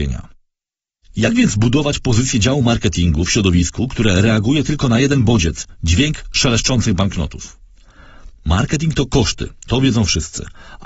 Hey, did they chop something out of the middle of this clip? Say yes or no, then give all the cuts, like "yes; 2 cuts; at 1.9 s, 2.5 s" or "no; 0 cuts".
no; 0 cuts